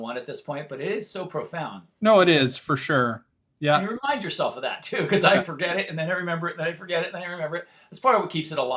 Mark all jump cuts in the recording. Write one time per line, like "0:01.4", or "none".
none